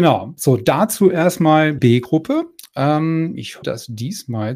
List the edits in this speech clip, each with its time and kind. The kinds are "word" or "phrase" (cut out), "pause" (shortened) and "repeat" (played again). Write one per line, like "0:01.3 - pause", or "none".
0:01.8 - word
0:03.6 - word